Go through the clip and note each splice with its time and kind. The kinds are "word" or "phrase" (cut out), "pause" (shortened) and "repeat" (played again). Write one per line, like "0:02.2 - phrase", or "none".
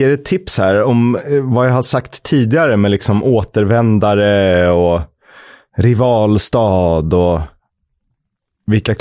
none